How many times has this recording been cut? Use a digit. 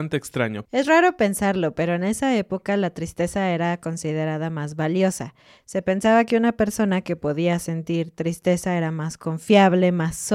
0